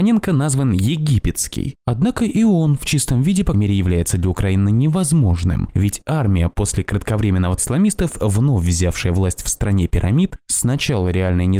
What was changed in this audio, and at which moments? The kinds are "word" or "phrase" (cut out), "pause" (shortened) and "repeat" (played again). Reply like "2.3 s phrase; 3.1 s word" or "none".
3.5 s word; 7.6 s word